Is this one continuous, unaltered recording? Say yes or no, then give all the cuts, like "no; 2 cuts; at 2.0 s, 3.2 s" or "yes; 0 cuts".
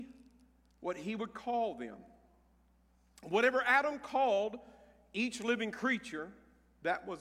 yes; 0 cuts